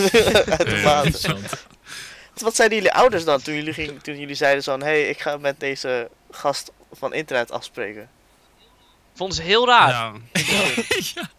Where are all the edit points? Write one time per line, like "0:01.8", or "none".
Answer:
0:02.4
0:05.6